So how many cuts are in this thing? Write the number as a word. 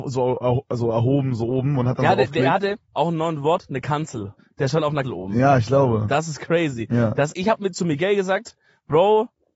three